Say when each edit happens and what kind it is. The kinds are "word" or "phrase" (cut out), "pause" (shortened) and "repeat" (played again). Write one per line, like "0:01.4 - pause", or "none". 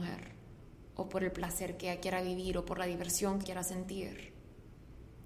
0:03.4 - word